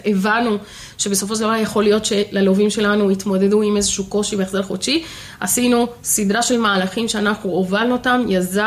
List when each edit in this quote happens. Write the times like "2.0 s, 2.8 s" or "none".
none

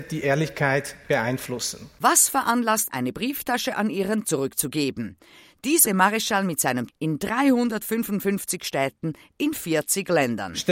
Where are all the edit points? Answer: 2.9 s, 4.2 s, 5.9 s, 6.9 s

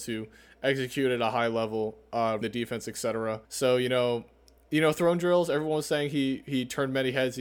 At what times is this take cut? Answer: 2.4 s, 3.4 s

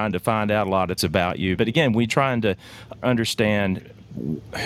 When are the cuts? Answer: 1.0 s, 1.6 s, 2.1 s, 3.0 s

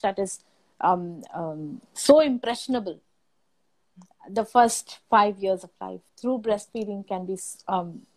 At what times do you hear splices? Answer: 1.9 s, 6.1 s

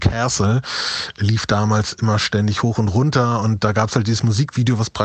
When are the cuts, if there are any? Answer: none

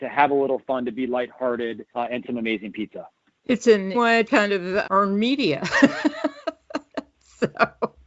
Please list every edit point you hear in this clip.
1.9 s, 2.2 s, 3.3 s, 3.9 s, 4.2 s, 4.8 s

